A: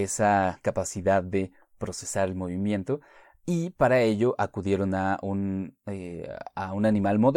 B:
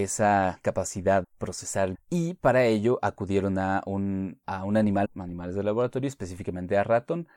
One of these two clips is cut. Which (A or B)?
B